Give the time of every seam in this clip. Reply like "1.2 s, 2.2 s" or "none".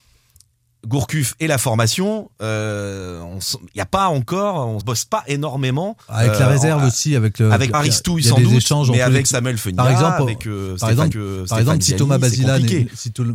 2.3 s, 4.8 s, 6.0 s, 7.7 s, 9.2 s, 11.1 s